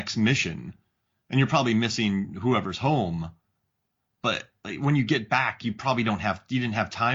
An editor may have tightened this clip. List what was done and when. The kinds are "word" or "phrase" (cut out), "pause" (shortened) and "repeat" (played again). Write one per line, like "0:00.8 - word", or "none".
none